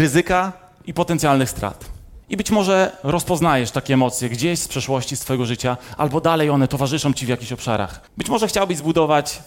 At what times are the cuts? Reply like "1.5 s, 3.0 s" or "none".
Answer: 2.2 s, 8.1 s

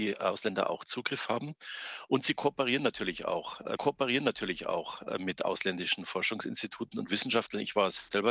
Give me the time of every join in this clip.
3.8 s

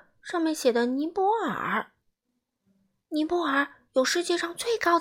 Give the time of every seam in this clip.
none

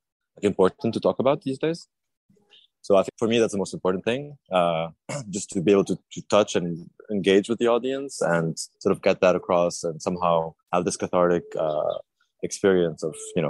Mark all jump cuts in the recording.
3.1 s, 8.7 s, 10.6 s

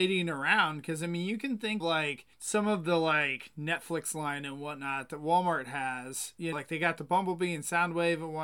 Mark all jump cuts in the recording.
1.8 s, 2.3 s, 6.5 s

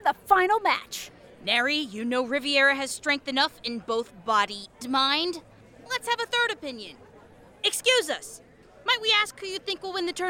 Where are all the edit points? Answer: 4.8 s

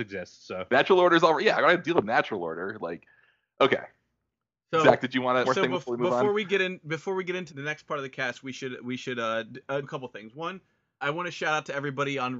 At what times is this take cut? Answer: 5.4 s, 7.5 s, 9.8 s, 11.0 s

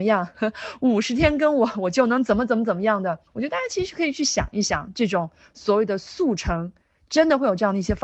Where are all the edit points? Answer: 3.3 s

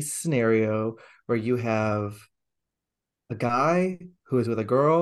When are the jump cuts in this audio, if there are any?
none

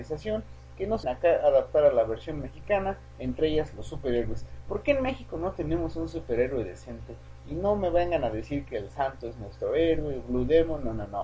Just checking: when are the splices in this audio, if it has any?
1.0 s

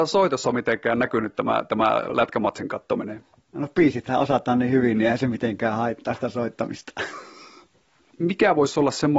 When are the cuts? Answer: none

